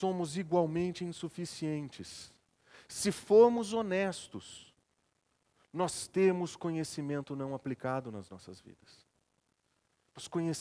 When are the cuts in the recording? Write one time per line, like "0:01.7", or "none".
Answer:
none